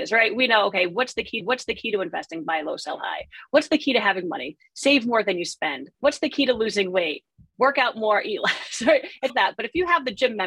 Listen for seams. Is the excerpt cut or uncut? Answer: cut